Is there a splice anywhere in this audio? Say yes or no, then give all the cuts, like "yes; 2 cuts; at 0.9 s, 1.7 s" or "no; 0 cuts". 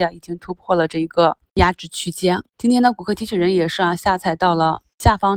yes; 1 cut; at 2.5 s